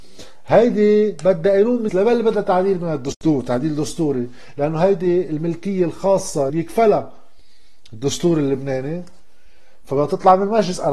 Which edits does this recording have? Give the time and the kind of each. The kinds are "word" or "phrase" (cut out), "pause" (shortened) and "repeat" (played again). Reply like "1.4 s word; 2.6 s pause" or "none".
1.9 s word; 6.5 s word